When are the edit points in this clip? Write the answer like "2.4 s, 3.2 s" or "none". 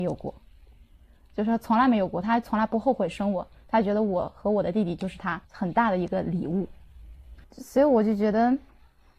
5.4 s, 7.4 s